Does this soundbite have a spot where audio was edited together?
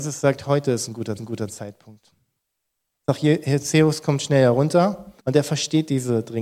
yes; 2 cuts; at 1.2 s, 5.2 s

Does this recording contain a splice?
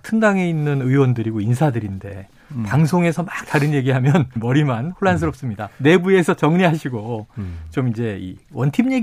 yes; 2 cuts; at 4.4 s, 5.7 s

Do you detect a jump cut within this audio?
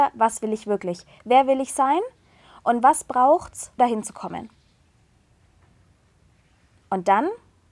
yes; 1 cut; at 3.8 s

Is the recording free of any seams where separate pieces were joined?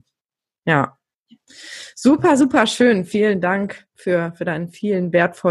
yes; 0 cuts

